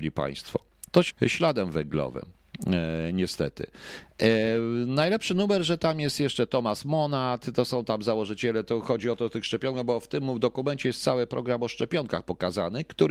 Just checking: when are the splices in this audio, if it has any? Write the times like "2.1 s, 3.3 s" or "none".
1.1 s